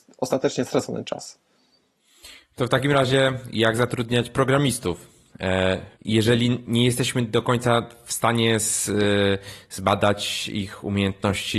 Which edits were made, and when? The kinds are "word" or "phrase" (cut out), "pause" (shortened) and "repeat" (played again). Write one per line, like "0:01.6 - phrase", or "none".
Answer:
0:05.9 - pause